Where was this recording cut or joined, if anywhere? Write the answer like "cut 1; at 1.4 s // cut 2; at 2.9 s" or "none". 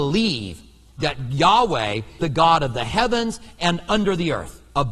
cut 1; at 2.2 s